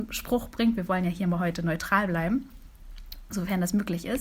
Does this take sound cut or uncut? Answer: uncut